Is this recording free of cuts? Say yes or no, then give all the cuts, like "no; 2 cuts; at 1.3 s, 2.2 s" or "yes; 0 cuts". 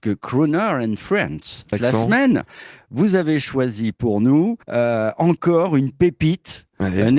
no; 2 cuts; at 1.7 s, 4.6 s